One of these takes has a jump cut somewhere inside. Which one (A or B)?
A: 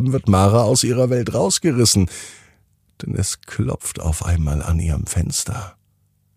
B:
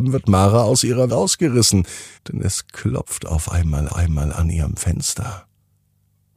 B